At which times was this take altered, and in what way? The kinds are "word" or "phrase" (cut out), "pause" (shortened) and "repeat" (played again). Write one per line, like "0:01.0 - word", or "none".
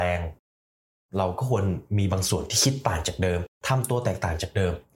0:03.6 - pause